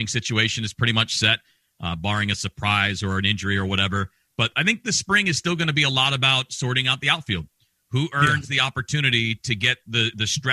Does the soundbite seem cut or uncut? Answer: uncut